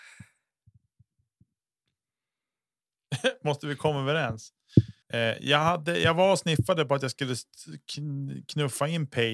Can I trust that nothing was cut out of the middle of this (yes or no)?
no